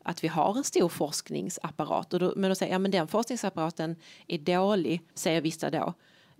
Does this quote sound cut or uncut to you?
cut